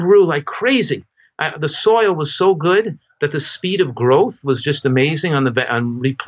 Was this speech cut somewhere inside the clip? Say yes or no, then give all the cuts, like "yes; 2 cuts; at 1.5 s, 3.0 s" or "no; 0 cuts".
no; 0 cuts